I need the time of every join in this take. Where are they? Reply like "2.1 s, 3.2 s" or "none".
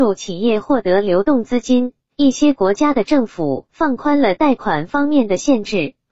3.7 s